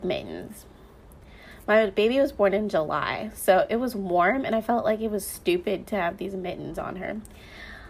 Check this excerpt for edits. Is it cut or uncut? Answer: uncut